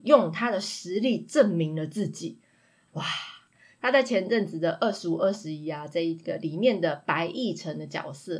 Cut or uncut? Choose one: uncut